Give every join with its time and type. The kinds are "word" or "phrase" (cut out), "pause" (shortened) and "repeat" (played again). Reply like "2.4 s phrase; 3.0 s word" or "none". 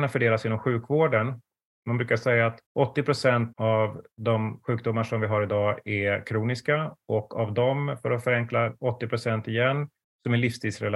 2.7 s pause; 3.5 s word; 4.1 s pause